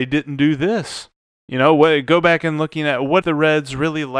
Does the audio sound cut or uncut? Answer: cut